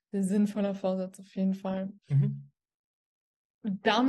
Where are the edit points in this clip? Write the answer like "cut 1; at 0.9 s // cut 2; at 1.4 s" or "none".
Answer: cut 1; at 2.0 s